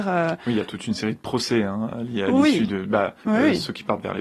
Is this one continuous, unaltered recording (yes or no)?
no